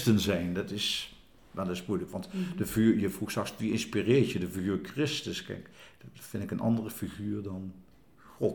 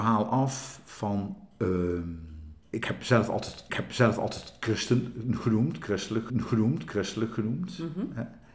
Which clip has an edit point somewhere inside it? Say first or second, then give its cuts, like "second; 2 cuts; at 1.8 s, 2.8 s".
second; 3 cuts; at 2.6 s, 3.7 s, 6.3 s